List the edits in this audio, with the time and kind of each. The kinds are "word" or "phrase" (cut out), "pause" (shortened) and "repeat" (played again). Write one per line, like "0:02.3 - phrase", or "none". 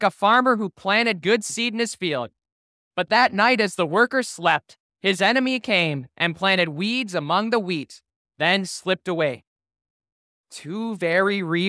none